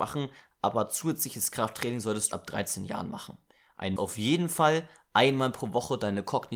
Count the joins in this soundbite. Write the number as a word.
two